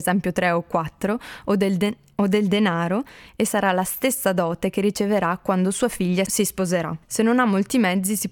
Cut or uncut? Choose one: uncut